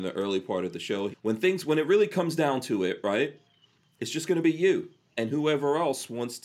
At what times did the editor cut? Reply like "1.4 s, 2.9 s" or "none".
1.1 s